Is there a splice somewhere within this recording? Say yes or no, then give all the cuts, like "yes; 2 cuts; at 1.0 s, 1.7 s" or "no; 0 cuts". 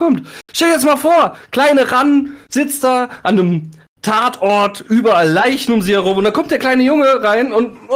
no; 0 cuts